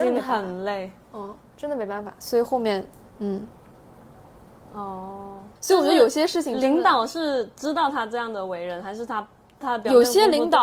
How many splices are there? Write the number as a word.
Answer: one